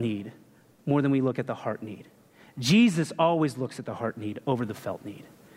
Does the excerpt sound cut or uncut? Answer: uncut